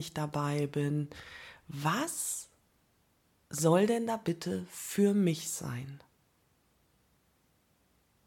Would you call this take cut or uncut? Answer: uncut